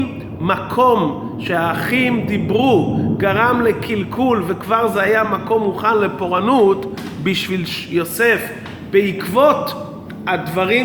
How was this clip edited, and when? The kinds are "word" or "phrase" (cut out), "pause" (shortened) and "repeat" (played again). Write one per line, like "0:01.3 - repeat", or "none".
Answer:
none